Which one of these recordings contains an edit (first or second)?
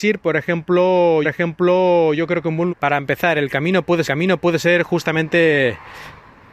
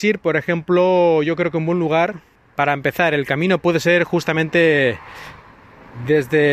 first